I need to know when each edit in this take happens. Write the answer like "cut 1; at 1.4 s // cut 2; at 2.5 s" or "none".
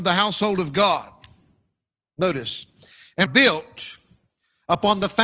cut 1; at 3.3 s

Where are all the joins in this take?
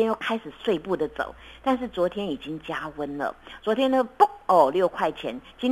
none

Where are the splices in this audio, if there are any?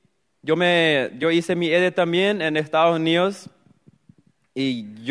none

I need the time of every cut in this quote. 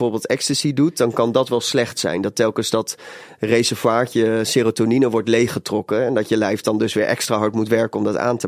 none

